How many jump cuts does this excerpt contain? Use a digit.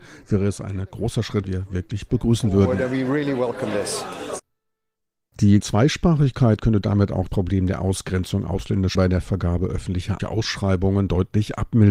5